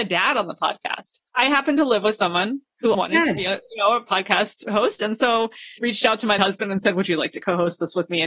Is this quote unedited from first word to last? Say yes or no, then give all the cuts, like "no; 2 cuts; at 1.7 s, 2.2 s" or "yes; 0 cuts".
no; 5 cuts; at 1.3 s, 2.9 s, 4.6 s, 5.8 s, 6.4 s